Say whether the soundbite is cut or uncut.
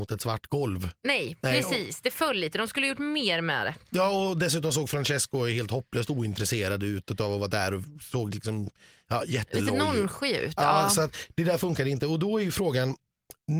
uncut